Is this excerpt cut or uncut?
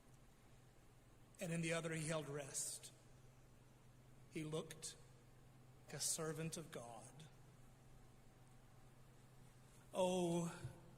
cut